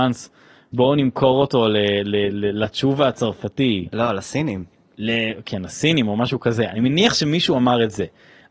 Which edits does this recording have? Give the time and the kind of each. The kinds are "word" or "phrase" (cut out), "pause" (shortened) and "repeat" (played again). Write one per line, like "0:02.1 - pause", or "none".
none